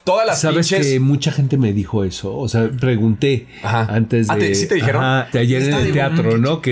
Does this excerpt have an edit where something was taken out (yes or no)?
yes